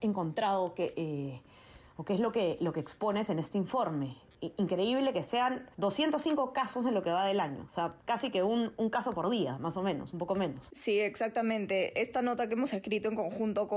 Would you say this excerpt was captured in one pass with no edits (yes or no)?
no